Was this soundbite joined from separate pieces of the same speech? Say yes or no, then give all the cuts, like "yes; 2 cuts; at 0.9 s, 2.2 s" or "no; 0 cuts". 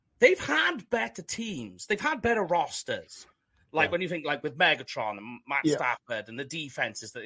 no; 0 cuts